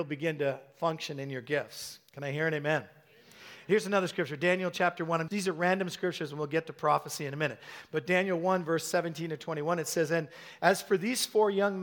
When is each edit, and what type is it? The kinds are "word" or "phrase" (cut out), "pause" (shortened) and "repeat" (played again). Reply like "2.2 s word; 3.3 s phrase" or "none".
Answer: 2.1 s pause; 5.3 s word